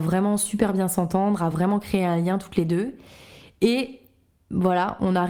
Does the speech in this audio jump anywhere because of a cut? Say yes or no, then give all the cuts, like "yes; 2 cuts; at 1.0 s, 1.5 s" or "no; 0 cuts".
no; 0 cuts